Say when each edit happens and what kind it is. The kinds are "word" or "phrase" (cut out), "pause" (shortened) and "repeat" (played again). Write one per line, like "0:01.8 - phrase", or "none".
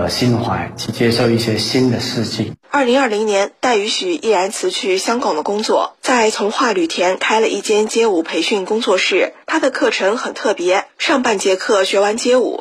0:02.6 - pause